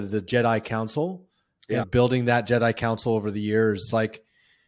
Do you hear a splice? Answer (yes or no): no